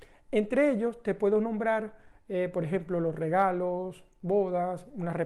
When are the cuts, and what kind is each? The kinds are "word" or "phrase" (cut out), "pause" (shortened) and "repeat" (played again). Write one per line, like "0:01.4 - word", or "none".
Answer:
none